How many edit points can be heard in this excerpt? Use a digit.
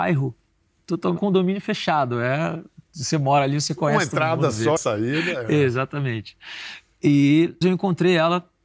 3